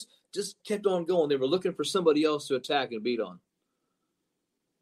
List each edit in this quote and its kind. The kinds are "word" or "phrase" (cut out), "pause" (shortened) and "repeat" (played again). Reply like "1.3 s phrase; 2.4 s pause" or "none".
none